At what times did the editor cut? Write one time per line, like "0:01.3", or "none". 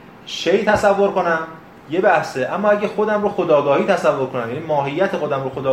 none

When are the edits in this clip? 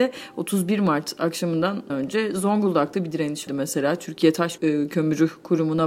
0:01.9
0:03.5
0:04.6

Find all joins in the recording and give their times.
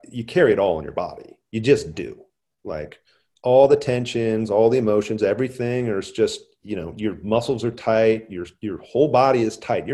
none

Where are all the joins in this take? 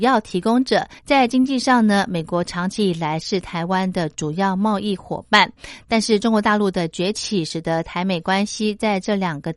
0:01.0

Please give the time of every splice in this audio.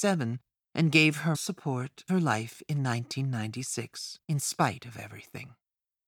0:01.3
0:02.1
0:04.2

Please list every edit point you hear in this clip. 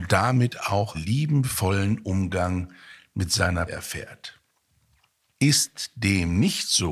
0:00.9
0:03.7

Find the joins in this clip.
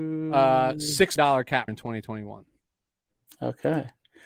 0:01.2
0:01.7

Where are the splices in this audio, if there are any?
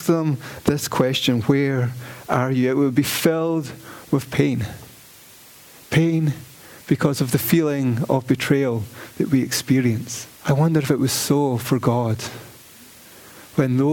0:10.3

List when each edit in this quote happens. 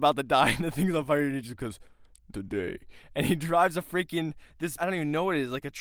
0:02.3
0:04.8

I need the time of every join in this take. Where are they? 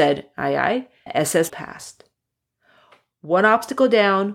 0:01.1
0:01.5

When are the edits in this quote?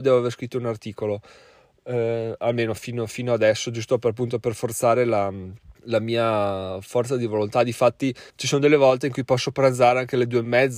0:05.7
0:08.3

